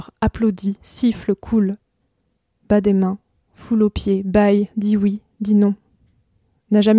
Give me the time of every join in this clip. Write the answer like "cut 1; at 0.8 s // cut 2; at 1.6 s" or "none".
none